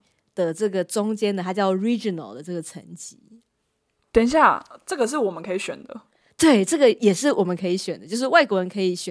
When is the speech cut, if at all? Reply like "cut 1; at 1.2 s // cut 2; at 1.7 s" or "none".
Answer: none